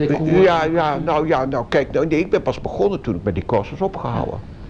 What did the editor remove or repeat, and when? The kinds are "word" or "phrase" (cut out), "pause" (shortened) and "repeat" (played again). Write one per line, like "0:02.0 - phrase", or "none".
none

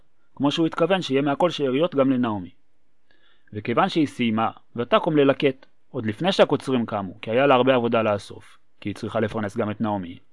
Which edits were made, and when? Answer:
none

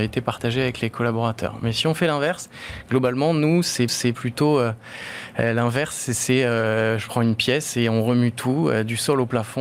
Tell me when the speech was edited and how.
0:03.9 - repeat

